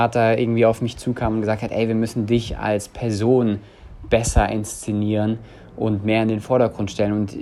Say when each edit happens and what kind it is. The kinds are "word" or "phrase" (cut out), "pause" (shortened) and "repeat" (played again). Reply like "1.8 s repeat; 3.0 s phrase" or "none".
none

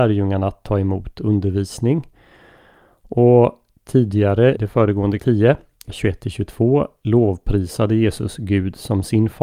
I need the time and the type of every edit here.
4.6 s word; 5.2 s word; 5.9 s word

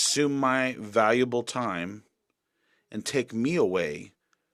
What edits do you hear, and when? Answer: none

